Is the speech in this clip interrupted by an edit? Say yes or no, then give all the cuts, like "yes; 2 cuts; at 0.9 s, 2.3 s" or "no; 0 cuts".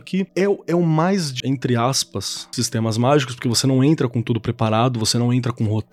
yes; 2 cuts; at 1.4 s, 2.5 s